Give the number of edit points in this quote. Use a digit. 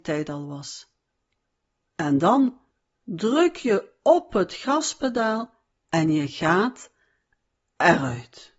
0